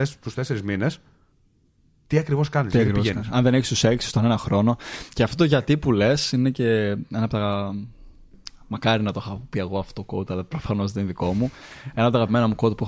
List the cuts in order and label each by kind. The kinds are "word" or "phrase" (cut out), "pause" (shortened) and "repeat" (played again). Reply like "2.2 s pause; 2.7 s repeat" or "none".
none